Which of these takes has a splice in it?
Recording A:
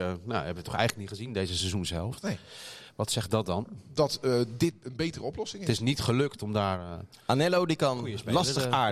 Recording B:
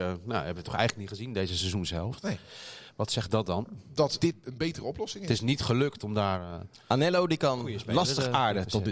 B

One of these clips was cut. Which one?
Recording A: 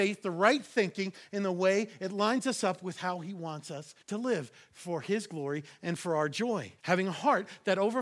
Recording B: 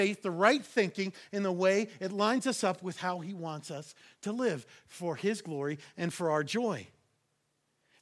A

